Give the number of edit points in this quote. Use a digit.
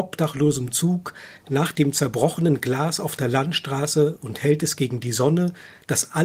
1